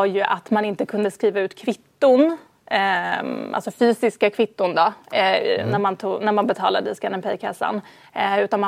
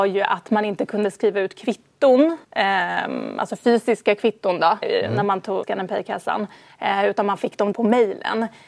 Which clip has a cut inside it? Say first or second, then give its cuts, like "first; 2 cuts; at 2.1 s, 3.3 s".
second; 4 cuts; at 2.4 s, 4.8 s, 5.6 s, 7.7 s